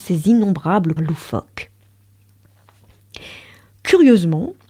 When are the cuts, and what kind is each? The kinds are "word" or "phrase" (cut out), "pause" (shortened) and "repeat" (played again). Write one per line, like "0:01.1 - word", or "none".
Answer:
0:01.0 - word

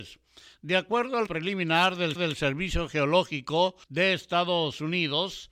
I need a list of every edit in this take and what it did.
0:01.3 - word
0:02.2 - repeat
0:03.8 - pause

